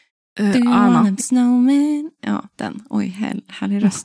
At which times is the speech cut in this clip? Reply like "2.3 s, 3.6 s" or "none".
1.2 s